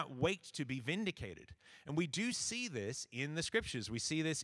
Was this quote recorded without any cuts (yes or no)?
yes